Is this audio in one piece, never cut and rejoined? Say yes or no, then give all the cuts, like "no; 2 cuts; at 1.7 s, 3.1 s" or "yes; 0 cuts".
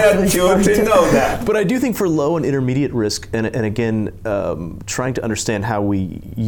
yes; 0 cuts